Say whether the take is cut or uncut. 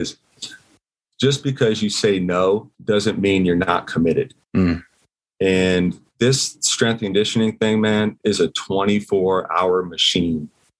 cut